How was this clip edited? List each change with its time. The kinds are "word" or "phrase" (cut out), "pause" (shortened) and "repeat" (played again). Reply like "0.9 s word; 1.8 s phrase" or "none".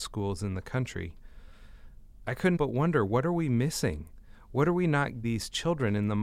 2.6 s word; 5.2 s word